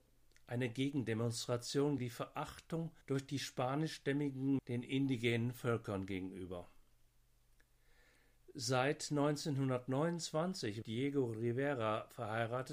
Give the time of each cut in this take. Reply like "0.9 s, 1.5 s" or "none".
2.0 s, 3.0 s, 4.6 s, 10.8 s

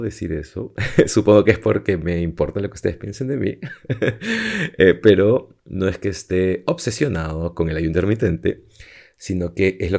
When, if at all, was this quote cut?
none

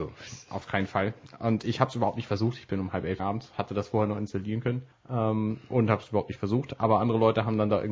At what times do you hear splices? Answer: 3.2 s, 4.9 s

